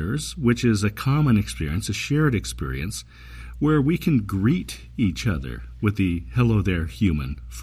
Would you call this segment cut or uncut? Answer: uncut